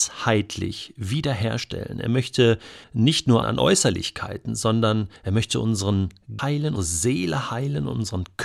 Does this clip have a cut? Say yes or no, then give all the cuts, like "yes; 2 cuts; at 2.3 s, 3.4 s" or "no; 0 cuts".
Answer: yes; 5 cuts; at 2.8 s, 3.4 s, 5.2 s, 6.4 s, 6.8 s